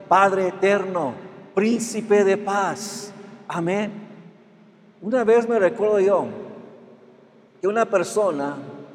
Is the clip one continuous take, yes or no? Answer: yes